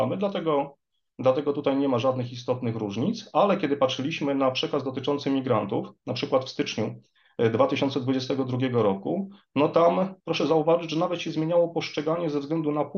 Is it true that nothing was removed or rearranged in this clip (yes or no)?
no